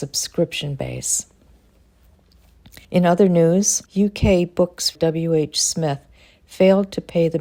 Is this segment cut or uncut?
cut